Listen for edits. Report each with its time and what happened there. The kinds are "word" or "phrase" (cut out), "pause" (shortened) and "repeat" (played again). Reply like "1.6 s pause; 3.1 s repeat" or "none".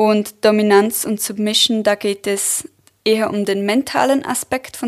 none